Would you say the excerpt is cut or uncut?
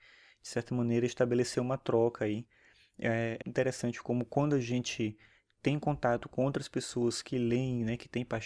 cut